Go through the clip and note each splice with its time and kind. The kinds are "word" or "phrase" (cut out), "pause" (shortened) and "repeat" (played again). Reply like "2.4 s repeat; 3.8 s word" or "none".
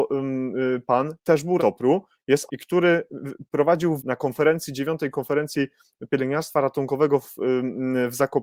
1.6 s word; 2.5 s word; 4.0 s word